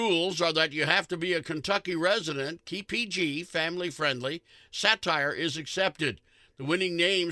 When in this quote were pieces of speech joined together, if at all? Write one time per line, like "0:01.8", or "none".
0:02.9